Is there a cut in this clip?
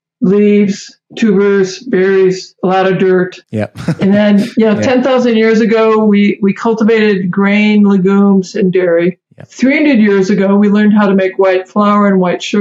yes; 3 cuts; at 1.1 s, 3.4 s, 9.3 s

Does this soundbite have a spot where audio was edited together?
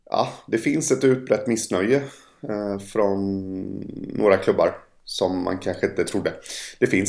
no; 0 cuts

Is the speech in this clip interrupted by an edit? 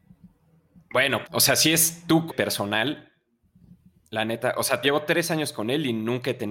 yes; 3 cuts; at 1.2 s, 2.3 s, 4.8 s

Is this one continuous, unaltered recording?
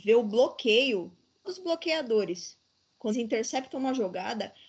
no; 2 cuts; at 1.4 s, 3.1 s

